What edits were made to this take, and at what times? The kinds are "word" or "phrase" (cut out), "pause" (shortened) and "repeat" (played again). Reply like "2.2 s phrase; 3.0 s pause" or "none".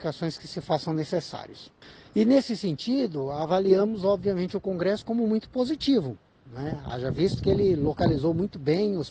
none